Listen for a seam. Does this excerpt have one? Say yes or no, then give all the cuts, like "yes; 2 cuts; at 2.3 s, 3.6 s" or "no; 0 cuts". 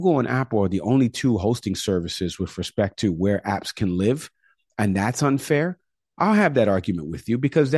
no; 0 cuts